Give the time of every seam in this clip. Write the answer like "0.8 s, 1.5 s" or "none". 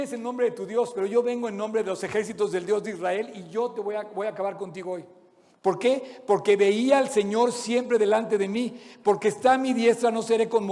none